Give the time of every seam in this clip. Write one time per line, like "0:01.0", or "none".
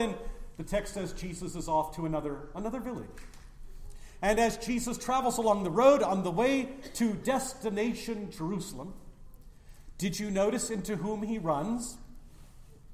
none